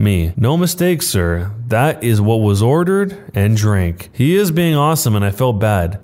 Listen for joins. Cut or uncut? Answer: uncut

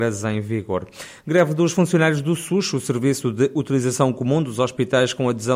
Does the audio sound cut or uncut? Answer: uncut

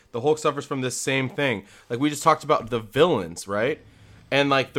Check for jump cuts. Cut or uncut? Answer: uncut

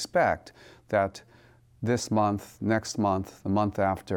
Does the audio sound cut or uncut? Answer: uncut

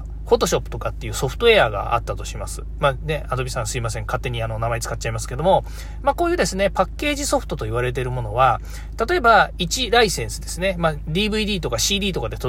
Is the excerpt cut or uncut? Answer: uncut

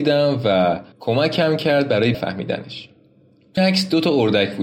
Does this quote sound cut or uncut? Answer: cut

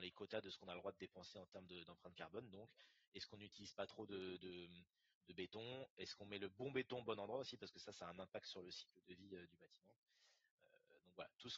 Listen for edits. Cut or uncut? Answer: uncut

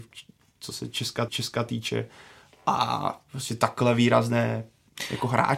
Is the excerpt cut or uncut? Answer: cut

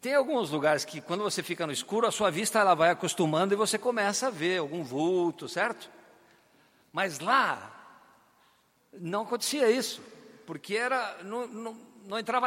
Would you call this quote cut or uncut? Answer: uncut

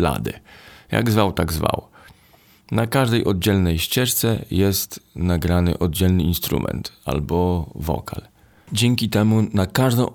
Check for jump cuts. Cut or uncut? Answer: uncut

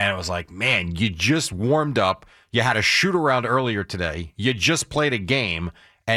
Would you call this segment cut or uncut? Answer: uncut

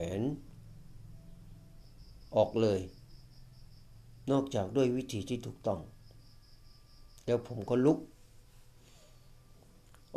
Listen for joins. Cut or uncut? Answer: uncut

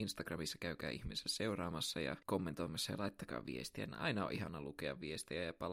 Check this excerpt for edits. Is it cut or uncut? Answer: cut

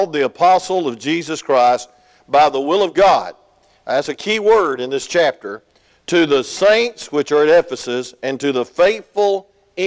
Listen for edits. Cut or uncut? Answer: uncut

